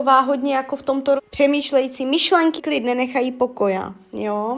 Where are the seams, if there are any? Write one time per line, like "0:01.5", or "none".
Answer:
0:01.2
0:02.6